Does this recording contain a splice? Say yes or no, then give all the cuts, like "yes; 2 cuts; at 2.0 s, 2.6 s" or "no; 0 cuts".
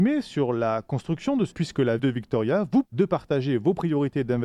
yes; 3 cuts; at 1.5 s, 2.0 s, 2.8 s